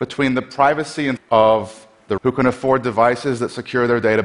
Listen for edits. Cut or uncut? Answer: cut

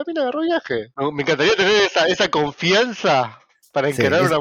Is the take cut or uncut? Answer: uncut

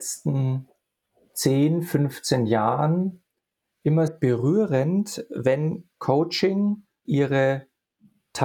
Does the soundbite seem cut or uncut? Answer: cut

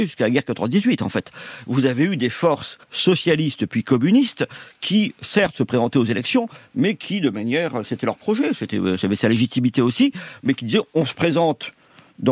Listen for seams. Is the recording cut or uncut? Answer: cut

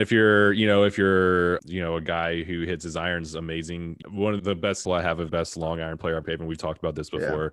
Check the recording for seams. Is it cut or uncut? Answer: cut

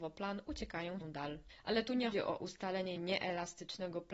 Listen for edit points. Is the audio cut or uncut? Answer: cut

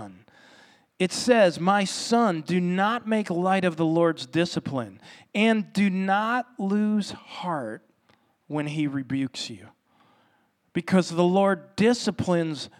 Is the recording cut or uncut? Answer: uncut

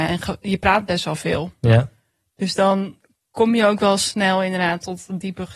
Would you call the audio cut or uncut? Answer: uncut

